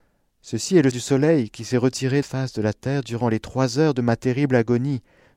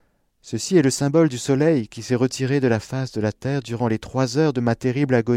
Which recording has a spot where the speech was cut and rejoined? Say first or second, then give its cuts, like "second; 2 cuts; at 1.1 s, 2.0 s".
first; 2 cuts; at 0.9 s, 2.2 s